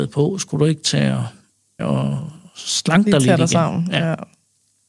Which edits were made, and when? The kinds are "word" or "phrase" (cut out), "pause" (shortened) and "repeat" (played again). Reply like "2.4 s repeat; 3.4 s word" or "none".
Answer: 1.8 s word

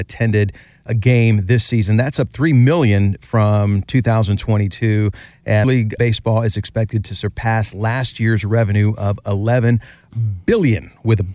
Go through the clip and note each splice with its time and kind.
5.6 s word

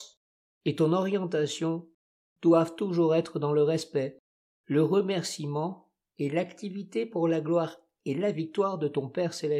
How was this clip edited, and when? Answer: none

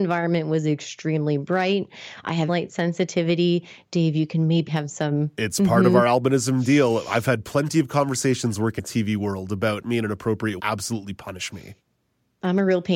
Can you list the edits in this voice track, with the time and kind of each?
2.5 s word; 4.7 s phrase; 8.8 s word; 9.8 s phrase; 10.6 s phrase

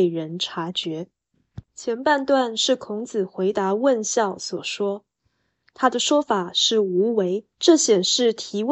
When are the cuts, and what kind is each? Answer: 1.7 s pause; 7.5 s pause

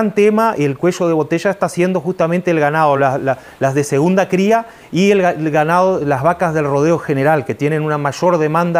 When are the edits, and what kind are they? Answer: none

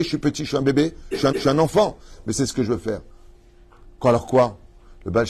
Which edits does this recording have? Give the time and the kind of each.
1.3 s repeat

